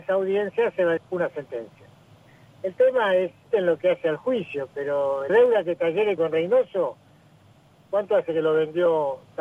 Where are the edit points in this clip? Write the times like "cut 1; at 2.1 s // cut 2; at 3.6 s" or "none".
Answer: cut 1; at 1.0 s // cut 2; at 3.5 s // cut 3; at 5.3 s // cut 4; at 6.2 s